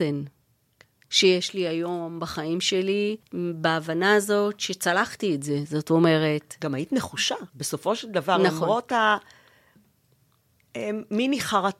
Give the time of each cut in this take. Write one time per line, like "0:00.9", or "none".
0:03.2
0:07.5